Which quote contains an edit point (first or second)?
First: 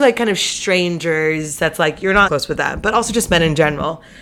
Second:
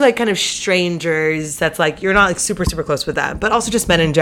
first